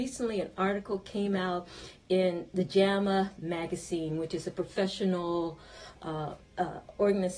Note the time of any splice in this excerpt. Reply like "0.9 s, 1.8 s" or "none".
none